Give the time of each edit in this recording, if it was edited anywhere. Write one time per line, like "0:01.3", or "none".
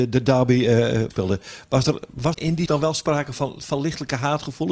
0:01.1
0:02.3
0:02.7